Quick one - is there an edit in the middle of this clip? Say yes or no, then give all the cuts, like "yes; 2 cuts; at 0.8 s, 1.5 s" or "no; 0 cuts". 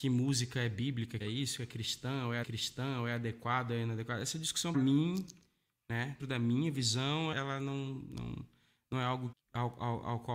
yes; 6 cuts; at 1.2 s, 2.4 s, 4.7 s, 6.2 s, 7.3 s, 9.3 s